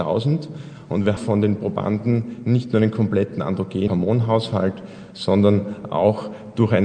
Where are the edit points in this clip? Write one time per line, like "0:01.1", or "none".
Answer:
0:01.2
0:03.9